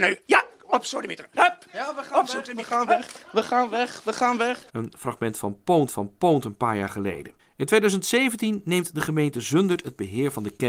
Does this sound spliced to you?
yes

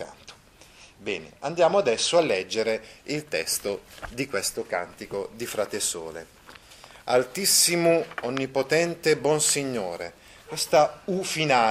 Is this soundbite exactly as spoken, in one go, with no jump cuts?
yes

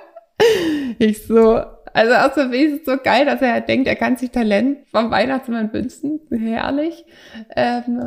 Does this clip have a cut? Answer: yes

